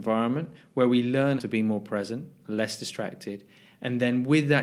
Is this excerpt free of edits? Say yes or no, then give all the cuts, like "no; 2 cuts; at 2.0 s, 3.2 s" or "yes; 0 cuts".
no; 1 cut; at 1.4 s